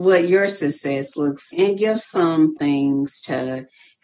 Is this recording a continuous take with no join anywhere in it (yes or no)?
no